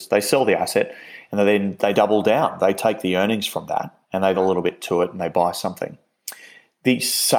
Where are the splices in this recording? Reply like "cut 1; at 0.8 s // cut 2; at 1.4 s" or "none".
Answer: cut 1; at 1.9 s // cut 2; at 4.0 s // cut 3; at 4.3 s